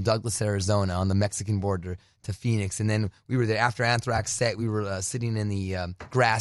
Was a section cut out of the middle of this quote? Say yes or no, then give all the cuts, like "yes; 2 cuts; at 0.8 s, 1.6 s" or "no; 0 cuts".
no; 0 cuts